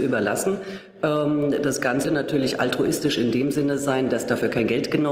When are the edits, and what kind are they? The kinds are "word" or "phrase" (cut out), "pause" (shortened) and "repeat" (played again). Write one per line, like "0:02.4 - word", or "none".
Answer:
0:02.0 - word